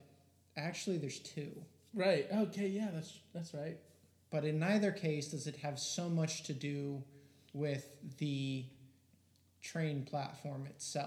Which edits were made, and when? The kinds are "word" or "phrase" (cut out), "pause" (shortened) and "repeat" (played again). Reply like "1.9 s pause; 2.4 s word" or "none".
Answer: none